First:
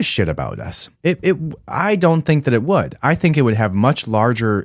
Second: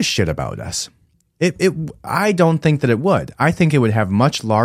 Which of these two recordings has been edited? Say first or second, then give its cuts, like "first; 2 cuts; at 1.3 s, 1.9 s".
first; 1 cut; at 0.9 s